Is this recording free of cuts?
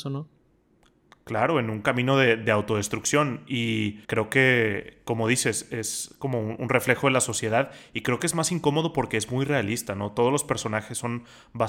no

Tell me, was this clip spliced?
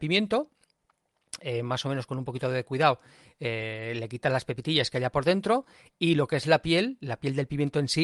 no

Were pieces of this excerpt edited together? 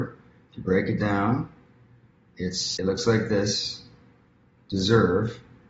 yes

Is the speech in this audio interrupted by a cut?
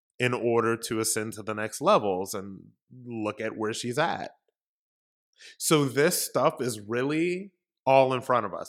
no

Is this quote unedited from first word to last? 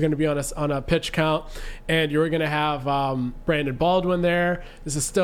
yes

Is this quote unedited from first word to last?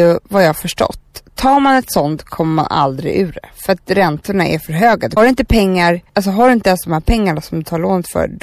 no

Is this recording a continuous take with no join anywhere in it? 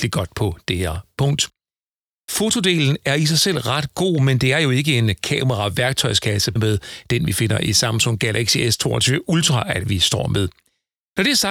no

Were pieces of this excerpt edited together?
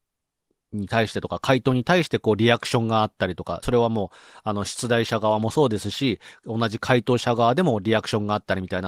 yes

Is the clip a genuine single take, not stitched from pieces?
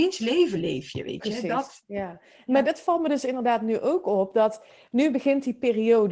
yes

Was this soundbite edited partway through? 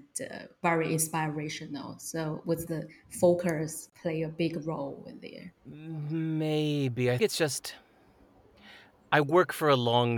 yes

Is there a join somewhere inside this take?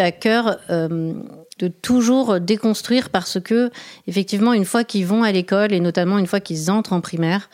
yes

